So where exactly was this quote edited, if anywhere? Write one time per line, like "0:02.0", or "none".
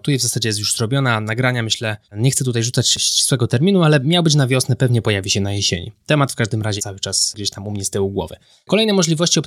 0:02.0
0:06.8